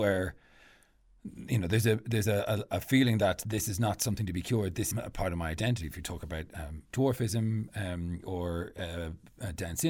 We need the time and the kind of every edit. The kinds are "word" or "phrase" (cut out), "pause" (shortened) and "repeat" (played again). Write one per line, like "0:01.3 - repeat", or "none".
0:04.9 - word